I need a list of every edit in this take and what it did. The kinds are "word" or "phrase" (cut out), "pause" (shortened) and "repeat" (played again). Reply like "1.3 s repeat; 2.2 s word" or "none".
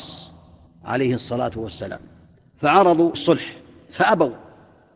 3.1 s word